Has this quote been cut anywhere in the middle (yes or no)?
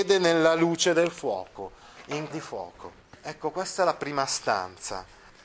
yes